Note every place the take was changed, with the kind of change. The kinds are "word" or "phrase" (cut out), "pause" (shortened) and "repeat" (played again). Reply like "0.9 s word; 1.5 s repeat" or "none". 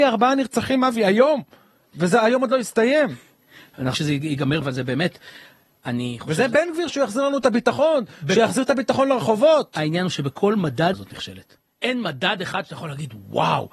3.9 s word; 4.6 s word; 6.9 s word; 10.9 s word